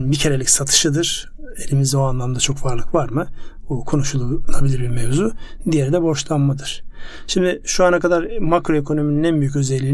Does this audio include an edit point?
no; 0 cuts

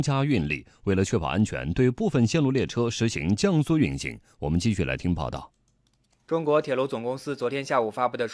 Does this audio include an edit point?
no; 0 cuts

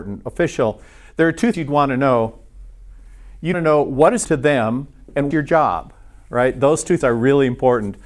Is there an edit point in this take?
yes; 5 cuts; at 1.5 s, 3.5 s, 4.2 s, 5.3 s, 7.0 s

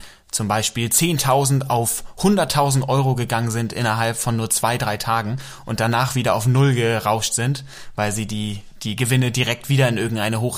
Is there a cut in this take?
no; 0 cuts

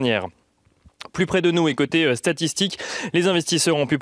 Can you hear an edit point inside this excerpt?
no; 0 cuts

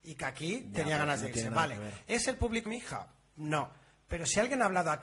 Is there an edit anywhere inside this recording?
yes; 1 cut; at 2.7 s

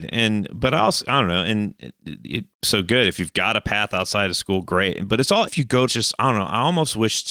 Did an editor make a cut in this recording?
yes; 4 cuts; at 2.5 s, 3.1 s, 5.5 s, 5.9 s

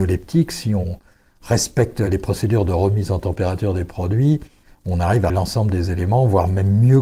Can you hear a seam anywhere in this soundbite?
yes; 1 cut; at 5.3 s

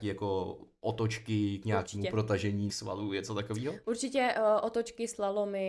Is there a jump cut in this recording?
yes; 1 cut; at 2.7 s

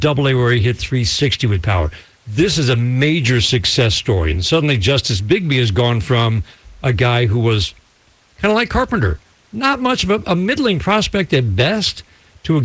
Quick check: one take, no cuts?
yes; 0 cuts

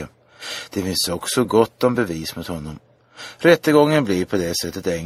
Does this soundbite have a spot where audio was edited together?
no; 0 cuts

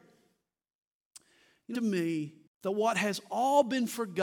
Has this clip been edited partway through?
yes; 2 cuts; at 1.7 s, 2.5 s

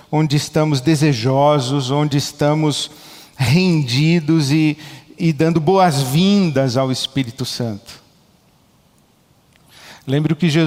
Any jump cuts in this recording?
no; 0 cuts

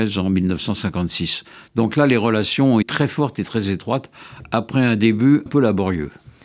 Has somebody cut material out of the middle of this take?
yes; 2 cuts; at 2.8 s, 5.5 s

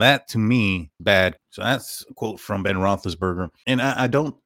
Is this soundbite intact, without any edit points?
no; 2 cuts; at 1.0 s, 1.4 s

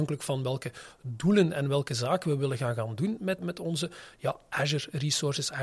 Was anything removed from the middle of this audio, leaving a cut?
yes; 1 cut; at 3.4 s

